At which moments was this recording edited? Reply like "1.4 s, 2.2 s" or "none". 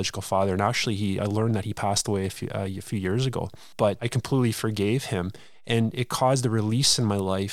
1.2 s

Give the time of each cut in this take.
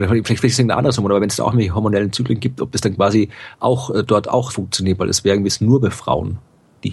4.5 s, 5.5 s

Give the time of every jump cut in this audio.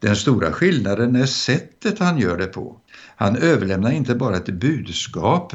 2.9 s

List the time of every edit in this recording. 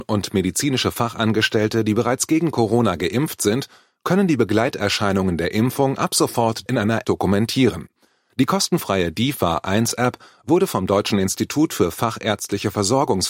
6.7 s, 7.0 s

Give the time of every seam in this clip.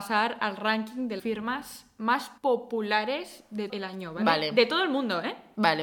1.2 s, 2.4 s, 3.7 s

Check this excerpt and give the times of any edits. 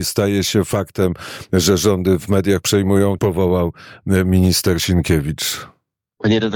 2.6 s, 3.2 s

